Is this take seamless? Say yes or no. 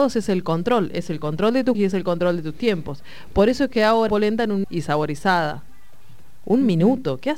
no